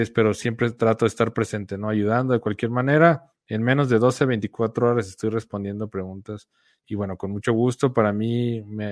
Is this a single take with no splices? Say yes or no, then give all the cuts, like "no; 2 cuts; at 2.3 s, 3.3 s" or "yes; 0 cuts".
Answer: yes; 0 cuts